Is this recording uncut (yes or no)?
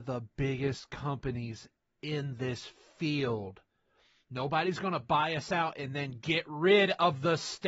yes